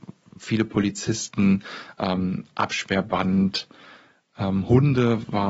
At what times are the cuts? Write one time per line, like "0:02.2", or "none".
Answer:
none